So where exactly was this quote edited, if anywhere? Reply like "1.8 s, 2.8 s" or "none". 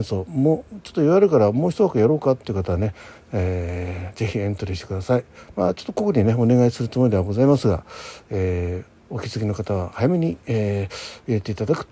none